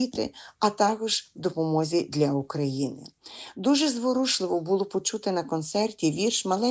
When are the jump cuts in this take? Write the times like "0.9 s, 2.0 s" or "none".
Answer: none